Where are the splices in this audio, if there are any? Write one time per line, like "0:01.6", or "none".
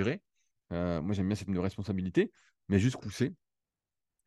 0:01.5
0:03.0